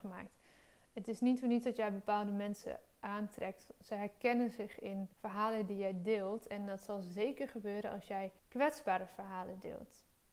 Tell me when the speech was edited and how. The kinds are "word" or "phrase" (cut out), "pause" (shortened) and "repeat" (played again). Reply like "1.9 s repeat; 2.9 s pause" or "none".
5.1 s pause; 8.4 s pause